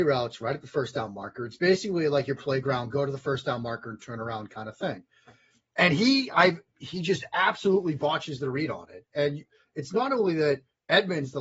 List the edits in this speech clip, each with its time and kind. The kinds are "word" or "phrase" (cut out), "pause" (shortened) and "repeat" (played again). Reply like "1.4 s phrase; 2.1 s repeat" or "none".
none